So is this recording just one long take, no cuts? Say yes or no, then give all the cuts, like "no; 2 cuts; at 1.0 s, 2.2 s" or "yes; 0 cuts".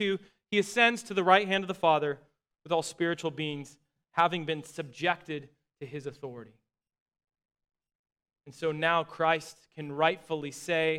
yes; 0 cuts